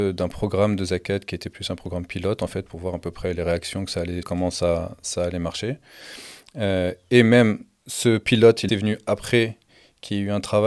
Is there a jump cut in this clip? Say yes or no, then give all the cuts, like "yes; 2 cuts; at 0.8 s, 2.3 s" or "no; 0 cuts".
yes; 2 cuts; at 4.2 s, 8.7 s